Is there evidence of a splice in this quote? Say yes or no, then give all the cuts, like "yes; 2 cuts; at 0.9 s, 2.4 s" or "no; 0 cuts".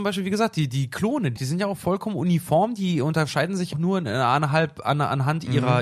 yes; 2 cuts; at 1.4 s, 3.7 s